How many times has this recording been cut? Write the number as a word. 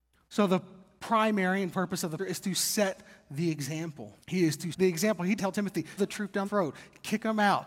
seven